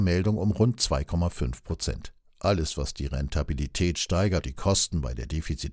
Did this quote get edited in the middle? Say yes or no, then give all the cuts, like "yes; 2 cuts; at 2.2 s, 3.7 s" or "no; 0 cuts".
yes; 1 cut; at 4.4 s